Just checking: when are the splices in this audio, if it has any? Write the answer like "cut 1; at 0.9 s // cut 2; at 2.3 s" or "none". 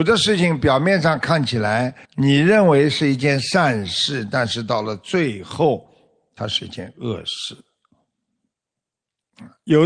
cut 1; at 2.0 s